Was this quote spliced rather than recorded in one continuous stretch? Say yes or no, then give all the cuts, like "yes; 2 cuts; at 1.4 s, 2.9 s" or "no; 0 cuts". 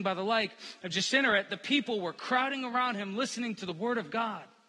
no; 0 cuts